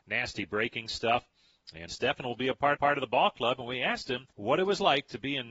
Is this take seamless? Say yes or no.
no